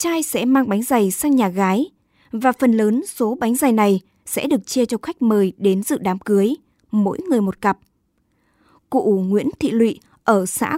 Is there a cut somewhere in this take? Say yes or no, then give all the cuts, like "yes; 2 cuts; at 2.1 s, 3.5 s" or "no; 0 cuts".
no; 0 cuts